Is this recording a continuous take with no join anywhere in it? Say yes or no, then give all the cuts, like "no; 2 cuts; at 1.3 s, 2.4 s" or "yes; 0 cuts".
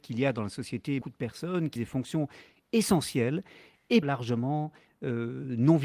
no; 3 cuts; at 1.0 s, 1.8 s, 4.0 s